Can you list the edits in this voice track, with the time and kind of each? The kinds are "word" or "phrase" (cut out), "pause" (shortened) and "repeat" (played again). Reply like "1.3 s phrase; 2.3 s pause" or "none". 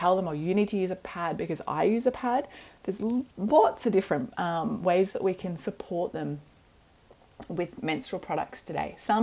3.3 s pause